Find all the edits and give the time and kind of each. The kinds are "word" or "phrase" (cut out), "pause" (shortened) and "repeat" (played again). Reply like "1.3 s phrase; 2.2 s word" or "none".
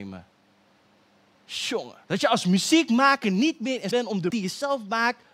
2.0 s pause; 3.9 s word; 4.3 s word